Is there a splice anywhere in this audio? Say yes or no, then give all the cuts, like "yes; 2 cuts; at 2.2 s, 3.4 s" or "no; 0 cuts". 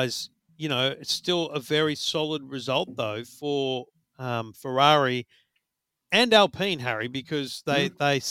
no; 0 cuts